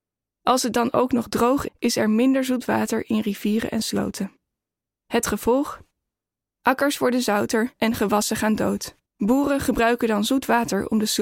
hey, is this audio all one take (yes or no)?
no